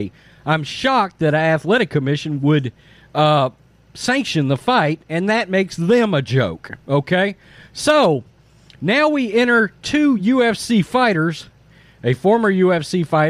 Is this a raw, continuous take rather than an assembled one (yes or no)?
yes